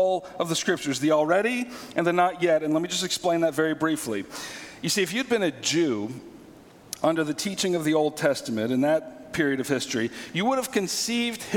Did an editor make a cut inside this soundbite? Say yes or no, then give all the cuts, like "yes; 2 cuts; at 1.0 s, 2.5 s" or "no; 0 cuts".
no; 0 cuts